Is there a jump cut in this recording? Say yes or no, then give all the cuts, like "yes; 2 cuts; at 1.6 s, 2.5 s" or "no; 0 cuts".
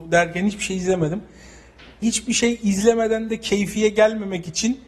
yes; 1 cut; at 2.0 s